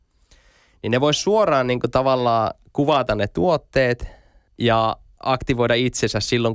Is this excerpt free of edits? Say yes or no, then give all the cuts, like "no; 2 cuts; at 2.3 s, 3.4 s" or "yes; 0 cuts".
yes; 0 cuts